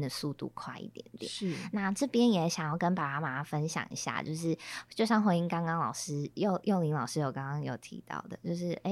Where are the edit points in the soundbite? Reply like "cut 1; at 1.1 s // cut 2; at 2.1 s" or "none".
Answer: none